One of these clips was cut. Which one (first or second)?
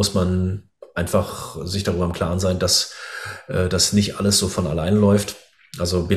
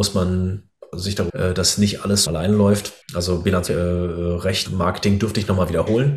second